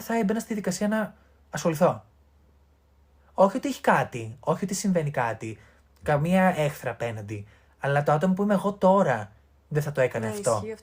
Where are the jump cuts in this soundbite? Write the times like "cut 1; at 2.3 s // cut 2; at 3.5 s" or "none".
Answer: none